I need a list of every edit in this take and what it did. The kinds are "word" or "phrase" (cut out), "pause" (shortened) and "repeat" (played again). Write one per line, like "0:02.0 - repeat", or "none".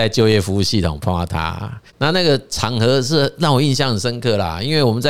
0:01.9 - pause

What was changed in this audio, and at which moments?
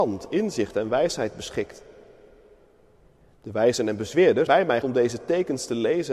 0:04.5 - word
0:04.8 - word

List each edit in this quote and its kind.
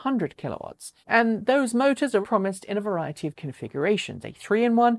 0:01.0 - pause
0:02.2 - word
0:03.3 - word

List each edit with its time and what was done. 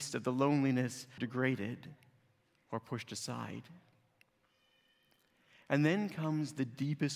0:01.2 - phrase

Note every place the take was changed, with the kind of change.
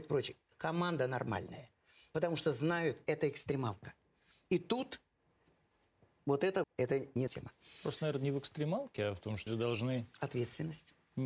0:06.6 - word
0:07.3 - word
0:09.5 - word

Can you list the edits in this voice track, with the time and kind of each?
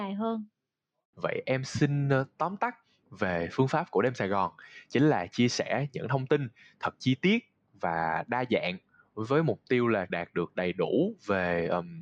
0:10.1 - word

